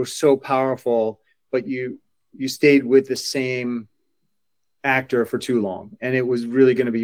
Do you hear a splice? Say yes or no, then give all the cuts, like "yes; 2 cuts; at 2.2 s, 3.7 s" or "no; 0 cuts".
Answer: no; 0 cuts